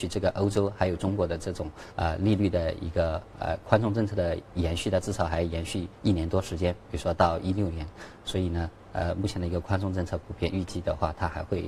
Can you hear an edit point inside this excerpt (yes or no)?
yes